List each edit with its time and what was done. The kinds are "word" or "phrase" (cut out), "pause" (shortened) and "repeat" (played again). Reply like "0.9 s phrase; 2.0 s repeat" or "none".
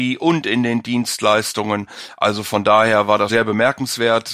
3.3 s word